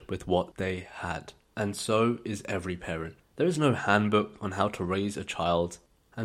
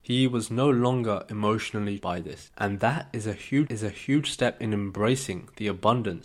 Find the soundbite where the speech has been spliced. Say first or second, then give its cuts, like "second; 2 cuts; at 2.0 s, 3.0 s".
second; 2 cuts; at 2.0 s, 3.7 s